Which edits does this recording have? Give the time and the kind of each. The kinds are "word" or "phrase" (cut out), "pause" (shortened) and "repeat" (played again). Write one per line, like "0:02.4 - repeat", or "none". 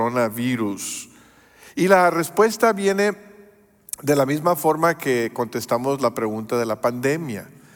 none